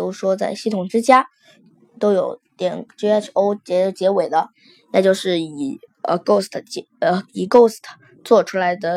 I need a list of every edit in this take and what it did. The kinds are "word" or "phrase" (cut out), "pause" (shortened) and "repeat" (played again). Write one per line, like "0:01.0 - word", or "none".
none